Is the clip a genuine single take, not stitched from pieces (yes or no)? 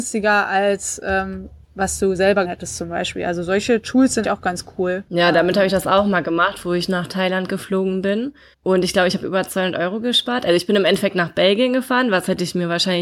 no